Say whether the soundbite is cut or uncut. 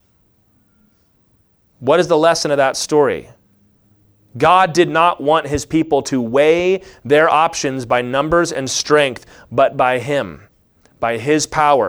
uncut